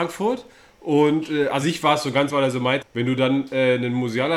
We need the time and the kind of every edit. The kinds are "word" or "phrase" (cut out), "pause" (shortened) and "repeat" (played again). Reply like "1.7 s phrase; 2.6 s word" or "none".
1.6 s word; 2.3 s word; 2.8 s word